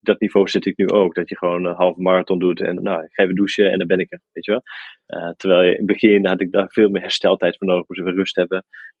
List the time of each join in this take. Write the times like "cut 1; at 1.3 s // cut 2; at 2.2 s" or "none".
cut 1; at 2.8 s